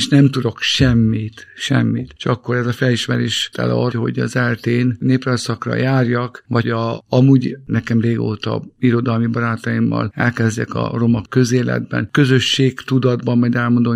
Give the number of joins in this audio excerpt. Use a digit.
3